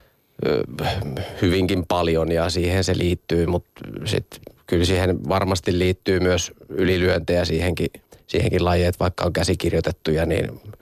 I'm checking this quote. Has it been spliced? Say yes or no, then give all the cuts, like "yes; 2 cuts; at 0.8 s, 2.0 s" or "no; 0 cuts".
yes; 1 cut; at 8.1 s